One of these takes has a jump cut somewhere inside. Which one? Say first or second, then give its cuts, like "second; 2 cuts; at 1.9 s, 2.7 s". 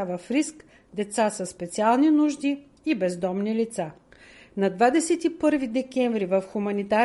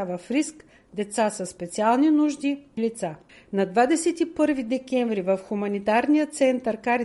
second; 2 cuts; at 2.8 s, 3.3 s